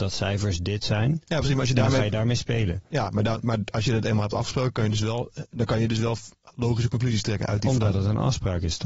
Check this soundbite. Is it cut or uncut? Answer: uncut